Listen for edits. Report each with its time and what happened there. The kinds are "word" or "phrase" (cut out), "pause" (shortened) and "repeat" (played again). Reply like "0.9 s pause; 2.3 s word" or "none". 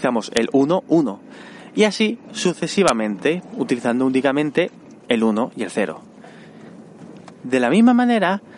5.0 s pause